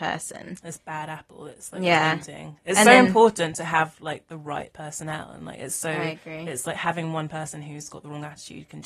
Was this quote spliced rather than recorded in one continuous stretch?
no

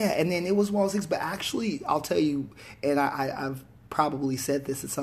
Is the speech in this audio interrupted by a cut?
no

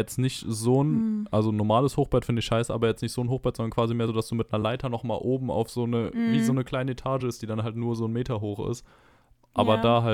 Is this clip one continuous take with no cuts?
yes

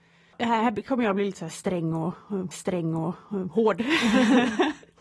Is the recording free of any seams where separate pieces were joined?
no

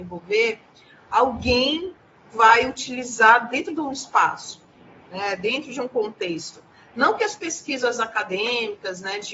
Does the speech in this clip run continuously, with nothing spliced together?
yes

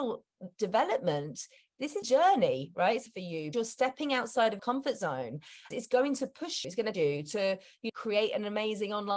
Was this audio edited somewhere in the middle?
yes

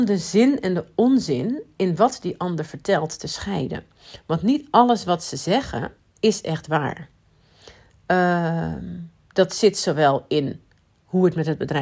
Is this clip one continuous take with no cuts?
yes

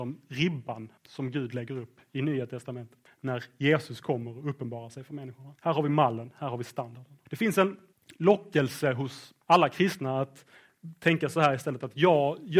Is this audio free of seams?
no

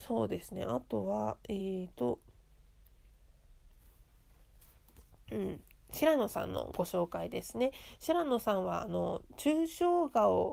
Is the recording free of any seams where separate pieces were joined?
yes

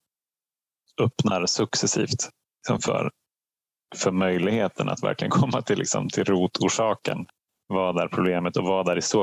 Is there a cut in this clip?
no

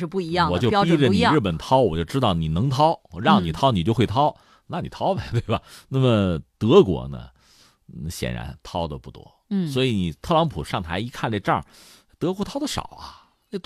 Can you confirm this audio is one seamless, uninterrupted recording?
yes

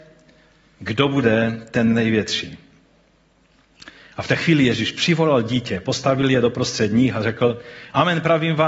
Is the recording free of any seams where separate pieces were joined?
yes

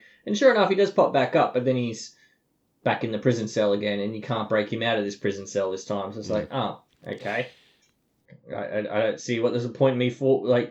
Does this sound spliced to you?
no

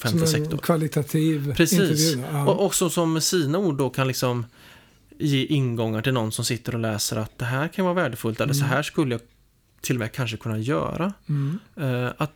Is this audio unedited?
yes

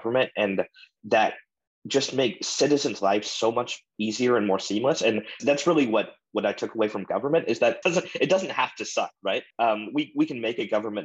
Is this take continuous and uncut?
no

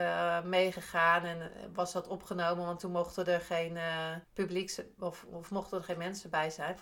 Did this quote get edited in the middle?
yes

